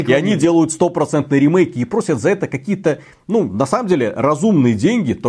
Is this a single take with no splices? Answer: yes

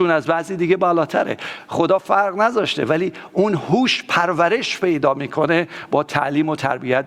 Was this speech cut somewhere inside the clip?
no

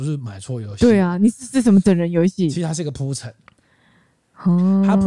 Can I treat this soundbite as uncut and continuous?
yes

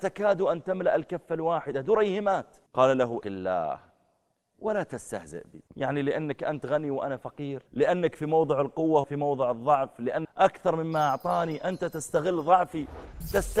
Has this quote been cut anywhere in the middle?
yes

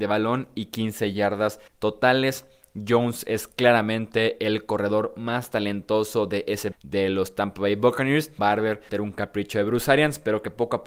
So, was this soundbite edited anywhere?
yes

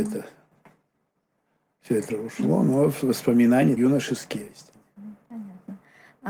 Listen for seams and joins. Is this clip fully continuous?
no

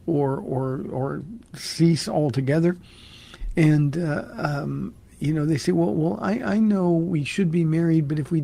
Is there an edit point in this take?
no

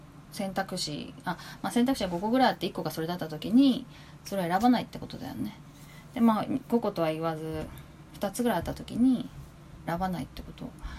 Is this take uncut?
no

